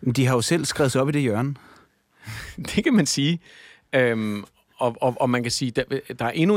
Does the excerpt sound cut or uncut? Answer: uncut